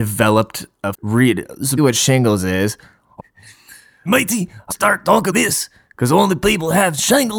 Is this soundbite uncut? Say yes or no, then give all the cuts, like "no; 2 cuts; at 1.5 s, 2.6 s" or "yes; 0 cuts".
no; 6 cuts; at 0.9 s, 1.8 s, 3.2 s, 4.1 s, 4.7 s, 5.3 s